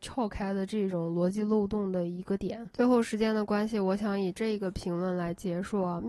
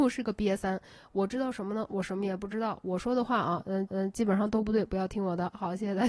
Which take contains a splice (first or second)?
second